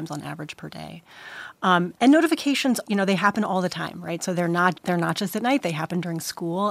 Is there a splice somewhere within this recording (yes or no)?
yes